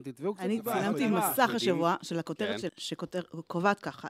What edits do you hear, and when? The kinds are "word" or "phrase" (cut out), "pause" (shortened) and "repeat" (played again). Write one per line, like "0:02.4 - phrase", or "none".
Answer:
0:02.7 - word

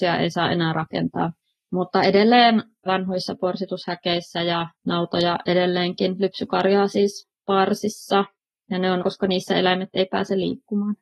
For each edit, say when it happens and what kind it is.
0:01.4 - pause
0:02.9 - phrase
0:04.7 - pause
0:08.4 - pause
0:09.0 - word

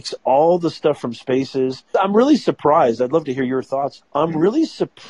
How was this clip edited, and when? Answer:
0:01.9 - word
0:04.0 - word

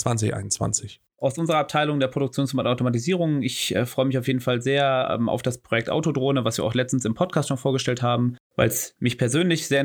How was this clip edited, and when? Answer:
none

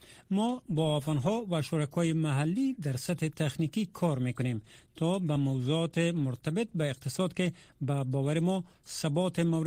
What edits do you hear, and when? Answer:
none

